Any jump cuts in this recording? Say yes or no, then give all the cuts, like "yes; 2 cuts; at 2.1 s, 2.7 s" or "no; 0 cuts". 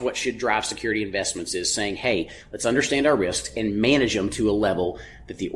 no; 0 cuts